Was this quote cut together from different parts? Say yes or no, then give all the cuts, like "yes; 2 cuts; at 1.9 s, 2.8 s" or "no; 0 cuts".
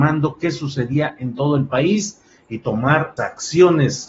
yes; 1 cut; at 3.2 s